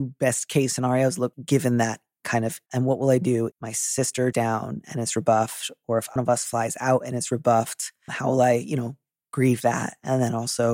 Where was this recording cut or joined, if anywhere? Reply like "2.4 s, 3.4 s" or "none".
1.3 s, 2.7 s, 3.5 s, 4.3 s, 6.2 s, 8.1 s